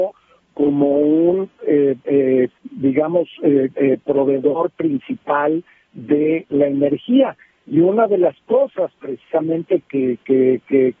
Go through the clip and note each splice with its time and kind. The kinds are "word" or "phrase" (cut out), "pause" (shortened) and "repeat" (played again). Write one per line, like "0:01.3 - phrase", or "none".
0:02.6 - pause